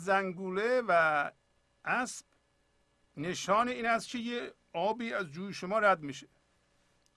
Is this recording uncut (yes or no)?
yes